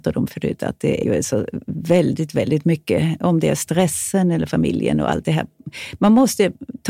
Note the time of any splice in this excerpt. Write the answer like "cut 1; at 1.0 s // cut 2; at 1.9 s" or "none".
cut 1; at 1.0 s